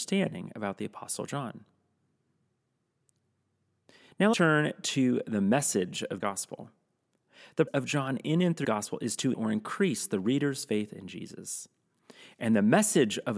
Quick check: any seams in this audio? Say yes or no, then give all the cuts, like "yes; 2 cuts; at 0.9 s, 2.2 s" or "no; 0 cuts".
yes; 5 cuts; at 4.3 s, 6.2 s, 7.7 s, 8.6 s, 9.3 s